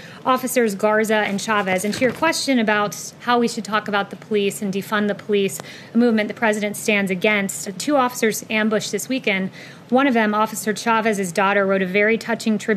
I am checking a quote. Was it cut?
yes; 1 cut; at 7.6 s

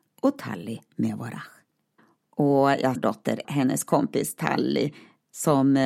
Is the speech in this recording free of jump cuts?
no; 3 cuts; at 2.0 s, 2.9 s, 3.4 s

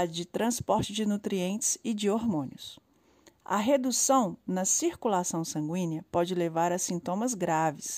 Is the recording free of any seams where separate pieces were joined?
yes; 0 cuts

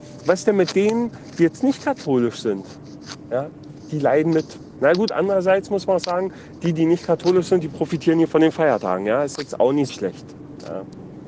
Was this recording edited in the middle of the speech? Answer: yes; 1 cut; at 9.9 s

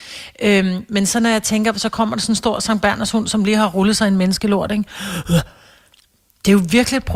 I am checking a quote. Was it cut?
no; 0 cuts

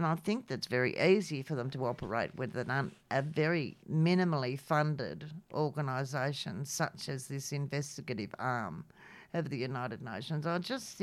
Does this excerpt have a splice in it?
yes; 2 cuts; at 3.8 s, 5.4 s

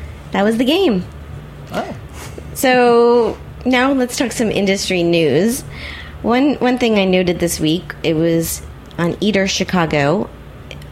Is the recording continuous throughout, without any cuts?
yes; 0 cuts

